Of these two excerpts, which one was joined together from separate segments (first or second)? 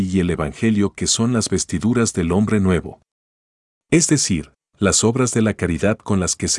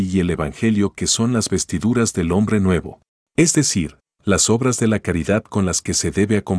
second